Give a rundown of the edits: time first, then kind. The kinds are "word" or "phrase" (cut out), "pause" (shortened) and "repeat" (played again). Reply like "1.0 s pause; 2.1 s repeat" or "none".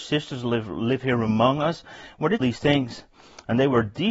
2.4 s phrase